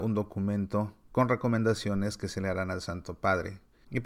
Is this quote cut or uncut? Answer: cut